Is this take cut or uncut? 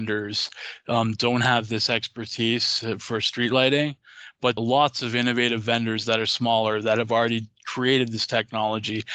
cut